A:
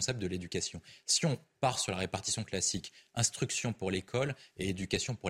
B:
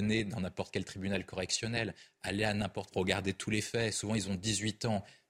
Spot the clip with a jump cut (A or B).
B